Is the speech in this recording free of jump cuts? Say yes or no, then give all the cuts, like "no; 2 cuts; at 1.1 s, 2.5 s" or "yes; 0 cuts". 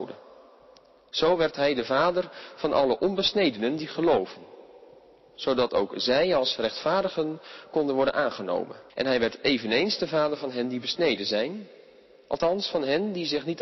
no; 1 cut; at 8.9 s